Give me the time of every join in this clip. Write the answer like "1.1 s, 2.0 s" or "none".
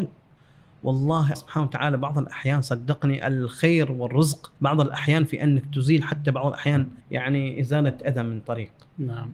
1.3 s, 4.6 s, 7.0 s